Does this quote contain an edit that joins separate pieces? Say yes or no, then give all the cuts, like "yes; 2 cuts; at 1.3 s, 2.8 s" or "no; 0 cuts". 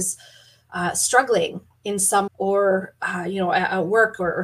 yes; 1 cut; at 2.3 s